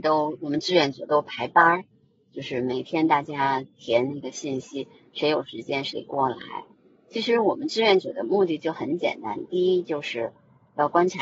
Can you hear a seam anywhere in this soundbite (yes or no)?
no